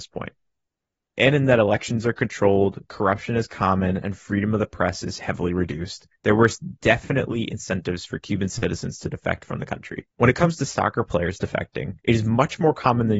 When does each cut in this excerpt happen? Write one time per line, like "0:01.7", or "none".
0:06.2
0:10.1
0:12.0